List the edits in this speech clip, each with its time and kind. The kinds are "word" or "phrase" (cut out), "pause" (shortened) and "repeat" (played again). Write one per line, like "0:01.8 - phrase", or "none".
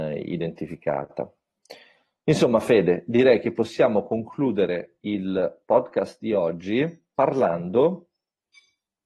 none